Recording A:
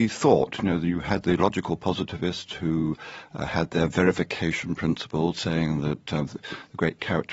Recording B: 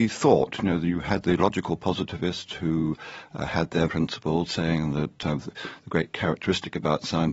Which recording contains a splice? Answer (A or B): B